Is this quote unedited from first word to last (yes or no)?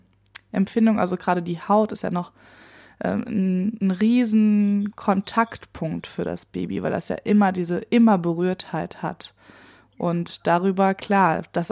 yes